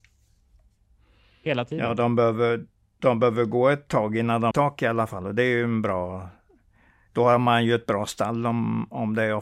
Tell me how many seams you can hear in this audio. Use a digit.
1